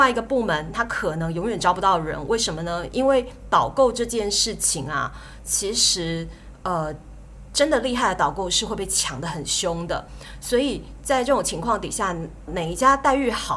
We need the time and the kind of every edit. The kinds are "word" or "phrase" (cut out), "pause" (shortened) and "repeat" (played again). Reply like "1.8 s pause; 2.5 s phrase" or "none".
12.5 s word